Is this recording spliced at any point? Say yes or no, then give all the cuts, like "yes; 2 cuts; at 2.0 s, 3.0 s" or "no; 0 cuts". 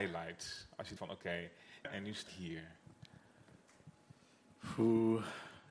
yes; 3 cuts; at 1.0 s, 1.8 s, 2.3 s